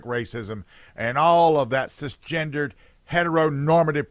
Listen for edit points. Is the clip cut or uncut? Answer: uncut